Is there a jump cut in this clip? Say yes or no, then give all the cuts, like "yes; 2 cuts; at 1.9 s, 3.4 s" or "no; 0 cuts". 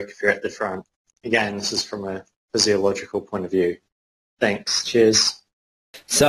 no; 0 cuts